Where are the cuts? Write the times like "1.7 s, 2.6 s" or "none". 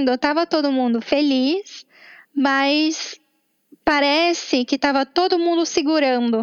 none